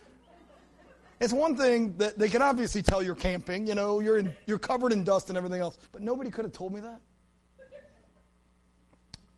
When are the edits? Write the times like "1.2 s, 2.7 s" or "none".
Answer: 5.9 s